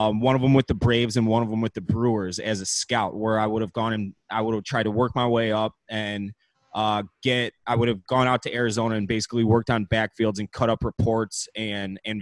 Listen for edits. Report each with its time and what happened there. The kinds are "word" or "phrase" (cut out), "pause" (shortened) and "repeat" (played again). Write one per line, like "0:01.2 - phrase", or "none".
none